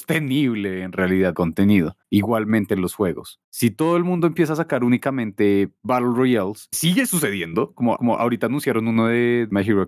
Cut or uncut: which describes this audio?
cut